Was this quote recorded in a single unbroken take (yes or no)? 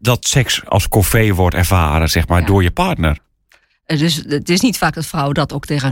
yes